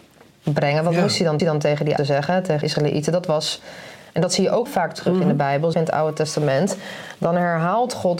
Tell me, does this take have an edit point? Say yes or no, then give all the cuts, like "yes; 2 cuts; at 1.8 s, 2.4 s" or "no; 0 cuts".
yes; 5 cuts; at 1.4 s, 2.0 s, 2.6 s, 4.7 s, 5.7 s